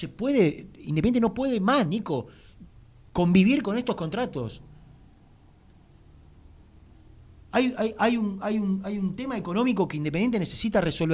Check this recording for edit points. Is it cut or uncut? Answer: uncut